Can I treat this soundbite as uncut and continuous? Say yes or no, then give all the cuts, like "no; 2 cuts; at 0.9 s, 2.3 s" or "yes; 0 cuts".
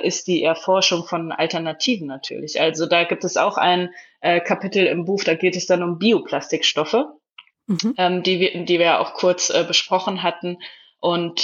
yes; 0 cuts